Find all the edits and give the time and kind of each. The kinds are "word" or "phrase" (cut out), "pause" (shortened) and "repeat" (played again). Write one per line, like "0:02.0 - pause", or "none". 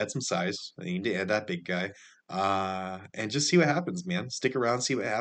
none